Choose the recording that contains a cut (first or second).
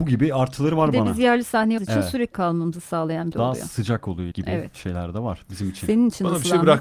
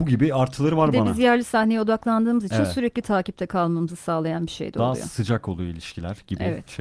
first